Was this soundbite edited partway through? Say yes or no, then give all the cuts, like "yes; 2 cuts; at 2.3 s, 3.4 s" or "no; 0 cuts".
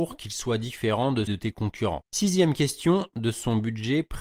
yes; 2 cuts; at 1.3 s, 3.1 s